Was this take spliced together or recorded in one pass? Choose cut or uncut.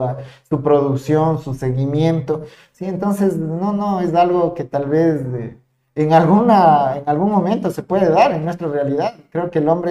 uncut